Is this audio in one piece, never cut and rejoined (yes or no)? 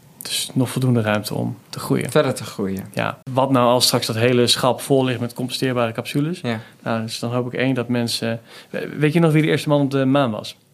no